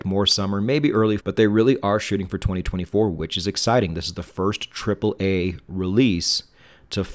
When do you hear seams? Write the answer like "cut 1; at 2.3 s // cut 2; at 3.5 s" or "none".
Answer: cut 1; at 1.2 s